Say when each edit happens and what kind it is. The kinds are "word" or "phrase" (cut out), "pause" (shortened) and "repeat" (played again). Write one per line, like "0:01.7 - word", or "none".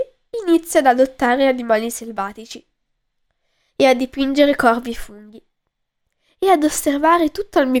none